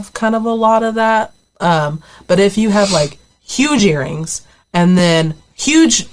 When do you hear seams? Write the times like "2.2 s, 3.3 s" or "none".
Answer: none